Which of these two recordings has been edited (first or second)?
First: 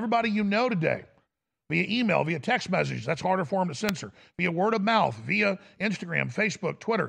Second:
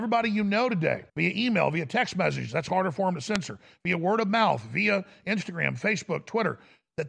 second